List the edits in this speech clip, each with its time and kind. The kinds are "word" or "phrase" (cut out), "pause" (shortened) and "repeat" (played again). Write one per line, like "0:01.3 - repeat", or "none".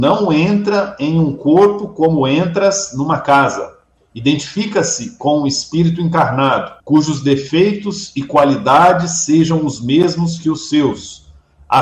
0:04.0 - pause
0:06.8 - pause